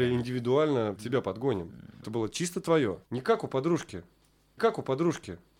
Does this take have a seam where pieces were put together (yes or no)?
yes